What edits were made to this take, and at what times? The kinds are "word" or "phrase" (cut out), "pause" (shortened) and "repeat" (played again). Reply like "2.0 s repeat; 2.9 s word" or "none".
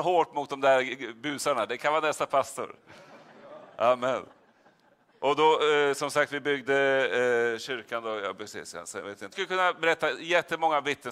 9.3 s phrase